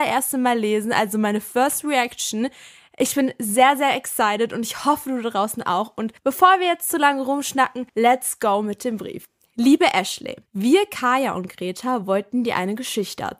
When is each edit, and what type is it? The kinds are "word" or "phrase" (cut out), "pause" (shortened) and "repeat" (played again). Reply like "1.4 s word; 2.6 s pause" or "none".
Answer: 6.2 s pause; 7.9 s pause; 10.5 s pause

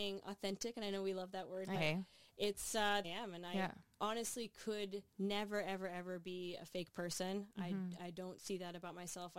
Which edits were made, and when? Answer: 1.7 s word; 3.0 s phrase; 5.1 s pause

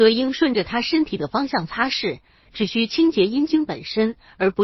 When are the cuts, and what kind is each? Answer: none

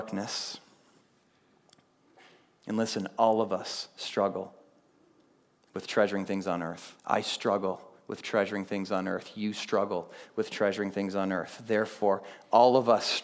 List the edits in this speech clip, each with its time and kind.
7.0 s pause

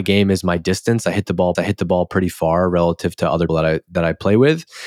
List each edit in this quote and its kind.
1.6 s repeat; 3.5 s word

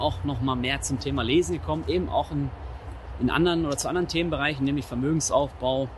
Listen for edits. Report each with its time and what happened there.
none

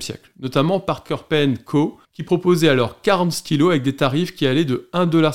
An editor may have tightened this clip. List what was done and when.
2.0 s pause

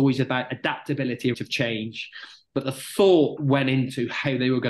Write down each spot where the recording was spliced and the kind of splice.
1.3 s word; 3.4 s word

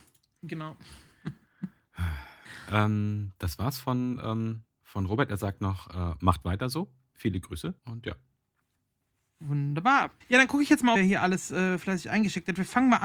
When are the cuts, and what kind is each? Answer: 4.7 s pause; 7.8 s pause; 10.2 s pause; 11.0 s phrase

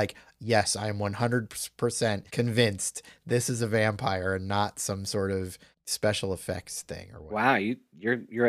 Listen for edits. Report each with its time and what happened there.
2.3 s pause; 5.8 s pause

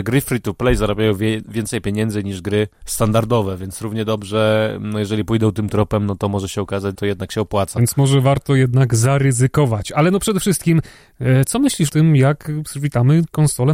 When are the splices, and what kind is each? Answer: 2.8 s pause; 6.9 s word; 11.9 s word

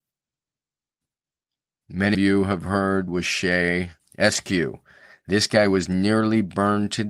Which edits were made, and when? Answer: 2.1 s word; 3.1 s phrase; 4.0 s pause

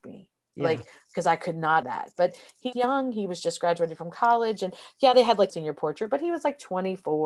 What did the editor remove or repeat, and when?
1.8 s word; 2.7 s word; 5.5 s phrase

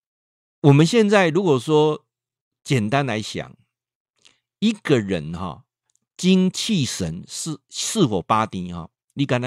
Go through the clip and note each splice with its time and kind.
none

